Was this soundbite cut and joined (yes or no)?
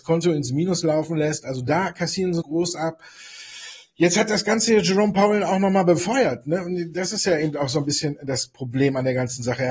yes